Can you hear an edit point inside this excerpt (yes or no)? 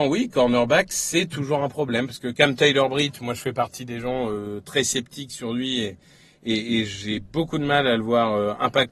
no